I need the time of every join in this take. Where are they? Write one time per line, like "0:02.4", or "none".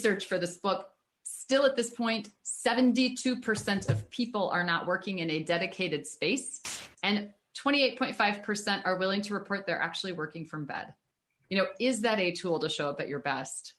0:06.9